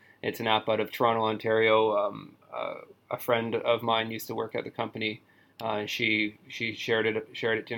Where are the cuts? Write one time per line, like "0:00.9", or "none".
none